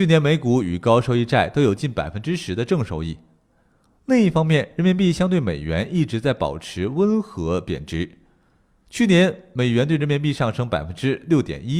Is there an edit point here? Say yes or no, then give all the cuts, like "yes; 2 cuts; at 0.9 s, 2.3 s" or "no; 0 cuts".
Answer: no; 0 cuts